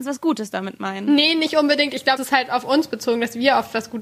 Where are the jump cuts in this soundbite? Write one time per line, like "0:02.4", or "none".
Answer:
0:02.2